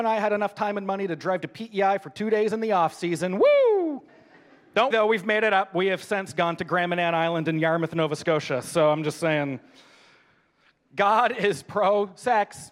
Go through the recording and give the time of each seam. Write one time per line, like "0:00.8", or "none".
0:04.1
0:04.9